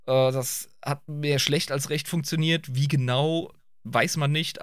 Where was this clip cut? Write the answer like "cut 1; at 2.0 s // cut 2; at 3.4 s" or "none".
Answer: none